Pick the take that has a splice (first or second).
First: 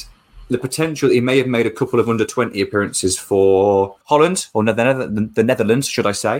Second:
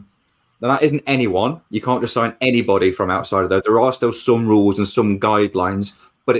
first